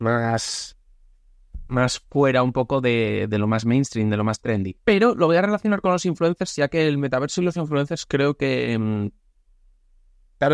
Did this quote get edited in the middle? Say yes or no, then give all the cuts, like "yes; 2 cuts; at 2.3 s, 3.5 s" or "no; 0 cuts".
yes; 1 cut; at 4.8 s